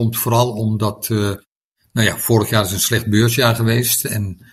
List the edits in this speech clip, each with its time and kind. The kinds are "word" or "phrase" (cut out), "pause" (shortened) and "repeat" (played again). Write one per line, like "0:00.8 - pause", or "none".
none

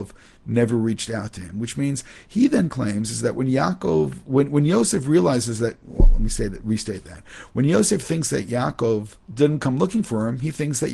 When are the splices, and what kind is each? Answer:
0:09.2 - pause

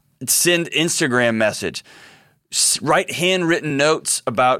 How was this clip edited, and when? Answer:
none

